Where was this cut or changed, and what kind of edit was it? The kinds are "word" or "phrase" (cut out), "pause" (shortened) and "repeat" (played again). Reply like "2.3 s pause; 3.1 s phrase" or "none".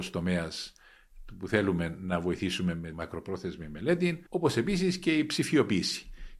2.9 s word; 4.3 s pause